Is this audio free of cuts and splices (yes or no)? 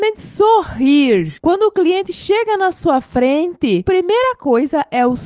no